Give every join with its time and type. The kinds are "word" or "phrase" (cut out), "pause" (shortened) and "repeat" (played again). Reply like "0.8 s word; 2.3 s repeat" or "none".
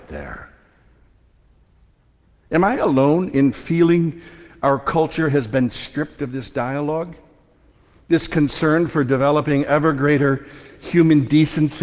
none